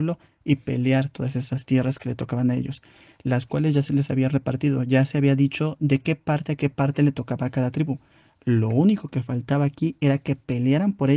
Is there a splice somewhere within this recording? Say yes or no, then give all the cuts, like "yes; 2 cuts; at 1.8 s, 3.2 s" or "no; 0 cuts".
no; 0 cuts